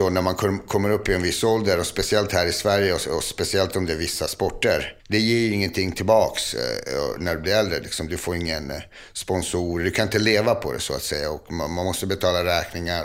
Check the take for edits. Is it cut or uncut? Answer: cut